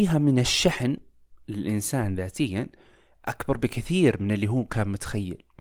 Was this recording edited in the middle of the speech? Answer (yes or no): no